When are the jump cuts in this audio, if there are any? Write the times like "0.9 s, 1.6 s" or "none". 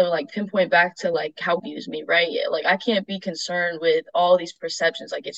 1.6 s